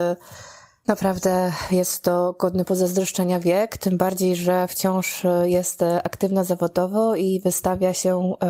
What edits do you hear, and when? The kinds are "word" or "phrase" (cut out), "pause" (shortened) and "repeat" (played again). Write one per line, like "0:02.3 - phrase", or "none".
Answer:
none